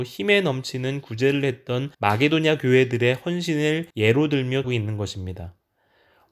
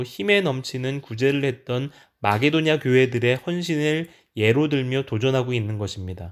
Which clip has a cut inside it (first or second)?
first